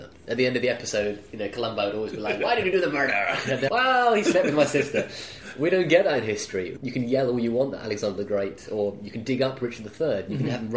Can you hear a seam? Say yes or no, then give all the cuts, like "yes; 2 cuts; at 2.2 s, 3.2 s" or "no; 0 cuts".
yes; 1 cut; at 3.7 s